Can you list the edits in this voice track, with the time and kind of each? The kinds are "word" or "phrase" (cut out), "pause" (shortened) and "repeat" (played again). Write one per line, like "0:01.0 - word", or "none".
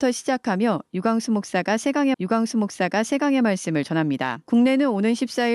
0:02.1 - repeat
0:04.4 - pause